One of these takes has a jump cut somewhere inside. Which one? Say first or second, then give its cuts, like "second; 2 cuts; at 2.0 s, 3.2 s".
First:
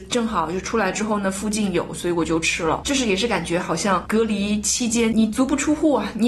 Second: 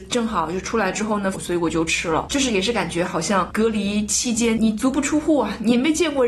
second; 1 cut; at 1.3 s